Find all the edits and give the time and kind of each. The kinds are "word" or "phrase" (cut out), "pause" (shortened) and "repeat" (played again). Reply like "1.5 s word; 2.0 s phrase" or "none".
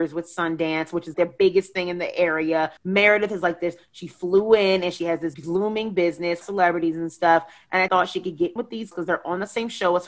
1.1 s word; 2.8 s pause; 5.3 s word; 6.4 s phrase; 7.9 s phrase; 8.6 s word; 8.9 s word